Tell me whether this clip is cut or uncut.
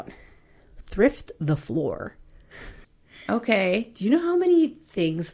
cut